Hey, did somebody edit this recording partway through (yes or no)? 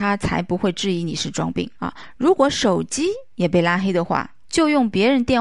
yes